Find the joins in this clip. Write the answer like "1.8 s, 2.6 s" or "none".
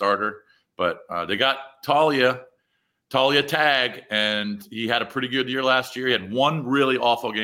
none